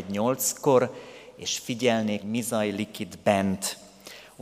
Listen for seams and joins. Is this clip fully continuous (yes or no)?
no